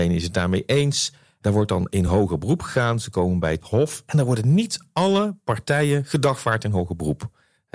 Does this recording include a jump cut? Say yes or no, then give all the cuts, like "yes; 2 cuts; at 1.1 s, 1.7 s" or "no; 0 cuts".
no; 0 cuts